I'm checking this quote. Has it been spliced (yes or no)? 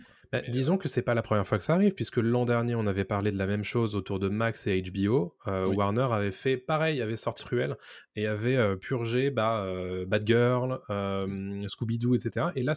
yes